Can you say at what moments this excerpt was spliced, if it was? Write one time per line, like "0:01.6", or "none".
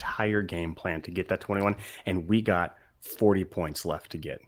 none